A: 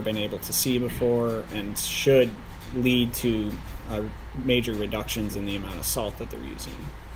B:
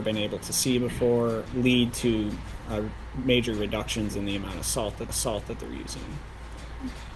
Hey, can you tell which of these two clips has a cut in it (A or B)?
B